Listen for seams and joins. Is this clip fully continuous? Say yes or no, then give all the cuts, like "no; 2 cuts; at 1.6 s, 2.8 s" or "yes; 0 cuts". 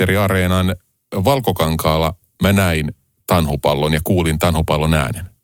yes; 0 cuts